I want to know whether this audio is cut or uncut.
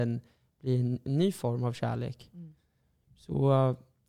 uncut